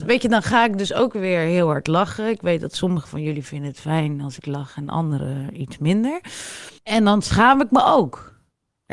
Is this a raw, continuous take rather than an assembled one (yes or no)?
no